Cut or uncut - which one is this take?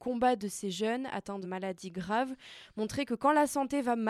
cut